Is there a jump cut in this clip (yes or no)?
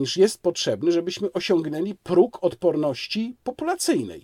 no